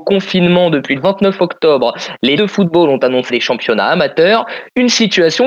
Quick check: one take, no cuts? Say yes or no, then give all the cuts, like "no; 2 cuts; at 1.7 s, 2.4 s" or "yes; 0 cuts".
no; 3 cuts; at 1.0 s, 2.4 s, 3.3 s